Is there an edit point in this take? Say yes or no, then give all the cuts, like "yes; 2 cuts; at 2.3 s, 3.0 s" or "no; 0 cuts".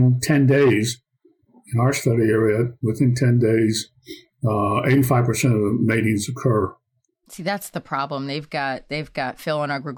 no; 0 cuts